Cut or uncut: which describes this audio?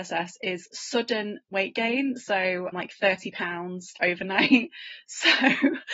cut